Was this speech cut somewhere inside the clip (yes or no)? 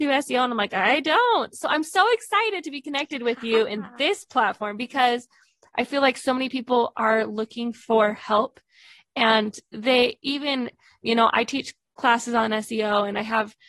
no